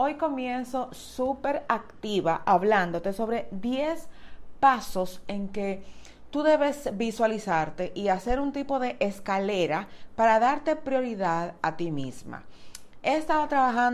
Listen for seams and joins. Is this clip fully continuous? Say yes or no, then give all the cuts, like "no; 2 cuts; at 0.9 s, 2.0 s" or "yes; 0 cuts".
yes; 0 cuts